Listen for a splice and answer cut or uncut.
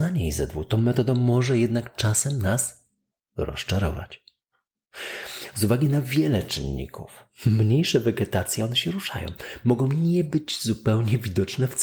uncut